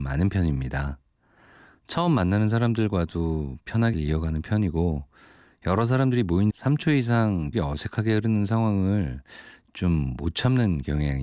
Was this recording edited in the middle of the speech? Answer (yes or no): yes